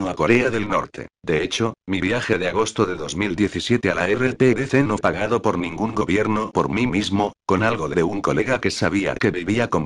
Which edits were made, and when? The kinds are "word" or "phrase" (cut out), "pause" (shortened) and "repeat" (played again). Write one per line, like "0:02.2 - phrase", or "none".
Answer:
0:01.2 - pause
0:05.0 - word
0:06.5 - word
0:07.9 - word